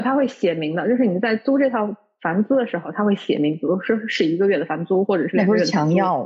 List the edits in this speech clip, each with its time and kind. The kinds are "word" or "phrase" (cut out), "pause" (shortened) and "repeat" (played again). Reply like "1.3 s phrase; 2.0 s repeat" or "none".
none